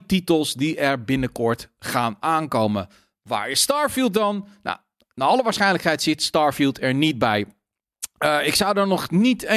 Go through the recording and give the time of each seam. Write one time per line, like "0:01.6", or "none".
none